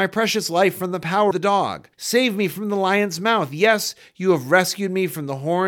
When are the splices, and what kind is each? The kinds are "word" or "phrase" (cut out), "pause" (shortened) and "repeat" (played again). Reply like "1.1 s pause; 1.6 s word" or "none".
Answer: 1.3 s word; 1.9 s pause